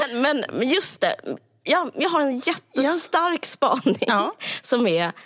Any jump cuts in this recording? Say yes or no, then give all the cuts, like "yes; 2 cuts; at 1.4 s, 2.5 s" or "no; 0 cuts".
no; 0 cuts